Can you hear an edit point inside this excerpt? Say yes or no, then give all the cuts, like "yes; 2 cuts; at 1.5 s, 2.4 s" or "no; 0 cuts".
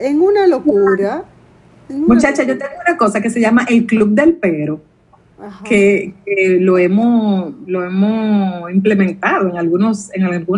no; 0 cuts